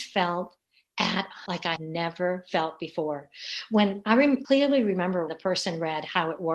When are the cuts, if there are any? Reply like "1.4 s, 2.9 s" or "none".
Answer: 1.5 s, 1.8 s, 4.4 s, 5.3 s